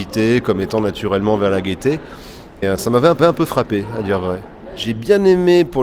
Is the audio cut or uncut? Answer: cut